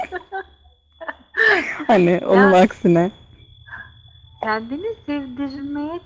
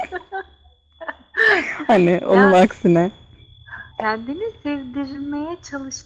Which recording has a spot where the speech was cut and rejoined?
second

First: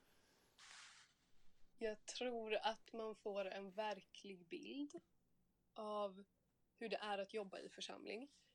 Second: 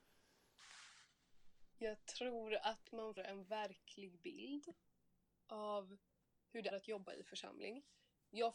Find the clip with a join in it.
second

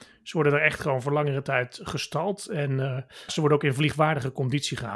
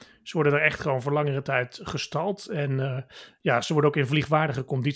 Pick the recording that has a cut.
first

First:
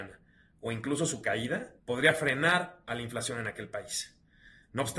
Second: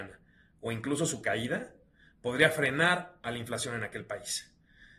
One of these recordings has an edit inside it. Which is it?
first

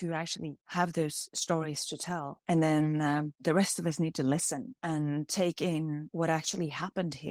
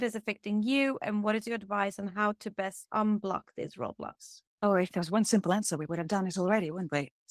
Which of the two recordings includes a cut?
second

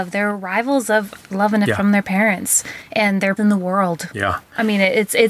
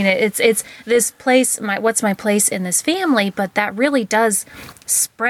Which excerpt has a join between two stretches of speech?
first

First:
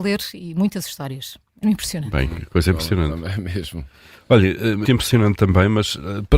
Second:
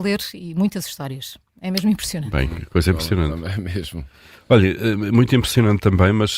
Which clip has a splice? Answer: first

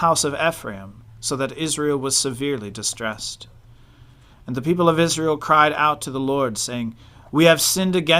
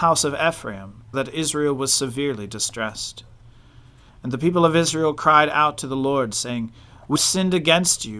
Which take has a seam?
second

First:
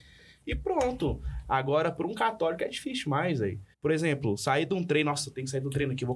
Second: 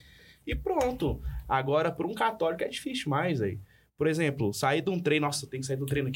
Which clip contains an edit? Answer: first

